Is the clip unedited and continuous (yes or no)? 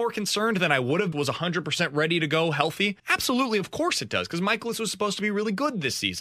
no